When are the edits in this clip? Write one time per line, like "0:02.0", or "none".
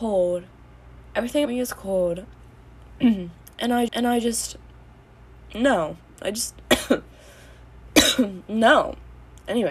0:01.4
0:02.5
0:03.9